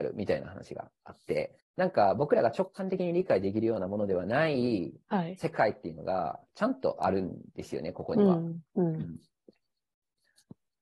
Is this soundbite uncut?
no; 2 cuts; at 1.6 s, 7.5 s

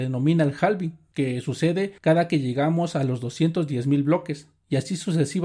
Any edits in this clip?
yes; 1 cut; at 2.0 s

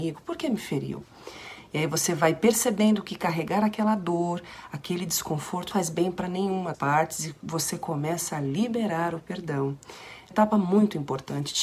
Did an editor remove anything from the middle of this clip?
yes; 3 cuts; at 5.7 s, 6.7 s, 10.3 s

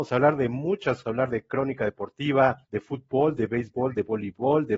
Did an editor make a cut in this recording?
yes; 2 cuts; at 1.0 s, 2.6 s

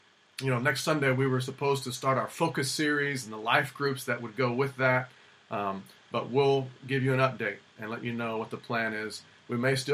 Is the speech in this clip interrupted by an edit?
no; 0 cuts

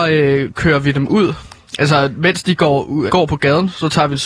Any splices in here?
yes; 1 cut; at 3.1 s

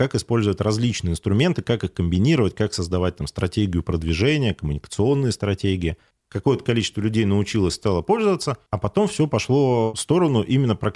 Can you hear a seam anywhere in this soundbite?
no; 0 cuts

